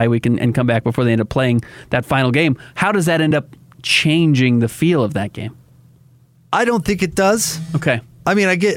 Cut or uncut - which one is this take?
uncut